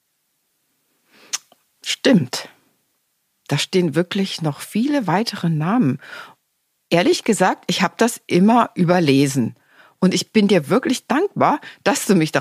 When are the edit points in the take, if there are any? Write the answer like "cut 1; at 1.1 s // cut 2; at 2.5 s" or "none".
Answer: none